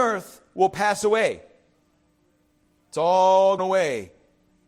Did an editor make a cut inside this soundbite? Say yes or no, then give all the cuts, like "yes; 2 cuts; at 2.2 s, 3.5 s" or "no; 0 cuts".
yes; 1 cut; at 3.6 s